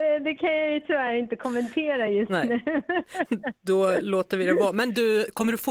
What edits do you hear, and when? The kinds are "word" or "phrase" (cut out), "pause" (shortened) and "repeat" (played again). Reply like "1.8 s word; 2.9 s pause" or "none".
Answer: none